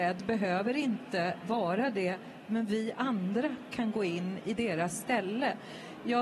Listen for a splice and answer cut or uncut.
uncut